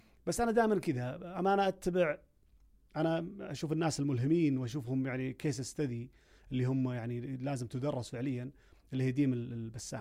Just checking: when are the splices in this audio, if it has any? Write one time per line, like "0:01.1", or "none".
none